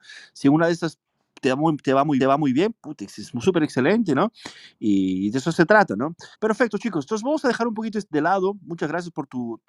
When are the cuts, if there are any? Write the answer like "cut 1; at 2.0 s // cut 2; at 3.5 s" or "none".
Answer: cut 1; at 2.2 s // cut 2; at 6.3 s